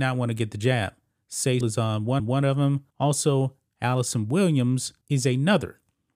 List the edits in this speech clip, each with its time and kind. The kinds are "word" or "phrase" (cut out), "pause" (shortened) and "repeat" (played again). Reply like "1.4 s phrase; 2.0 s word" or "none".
1.6 s word; 2.2 s repeat; 2.9 s pause; 5.0 s pause